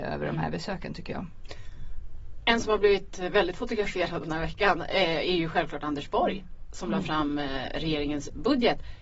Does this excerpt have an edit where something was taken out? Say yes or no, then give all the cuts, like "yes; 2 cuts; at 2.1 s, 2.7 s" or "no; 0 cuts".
no; 0 cuts